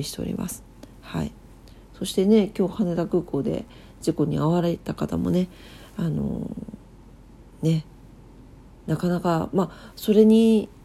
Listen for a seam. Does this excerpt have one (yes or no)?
no